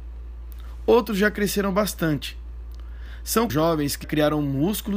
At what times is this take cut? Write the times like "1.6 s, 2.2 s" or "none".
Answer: 3.5 s, 4.0 s